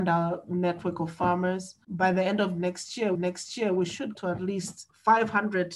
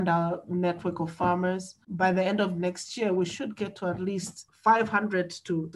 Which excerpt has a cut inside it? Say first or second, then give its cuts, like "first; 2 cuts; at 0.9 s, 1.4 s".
first; 2 cuts; at 3.1 s, 4.1 s